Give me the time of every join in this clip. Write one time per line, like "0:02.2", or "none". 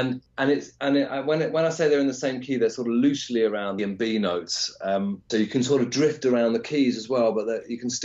0:03.8
0:05.3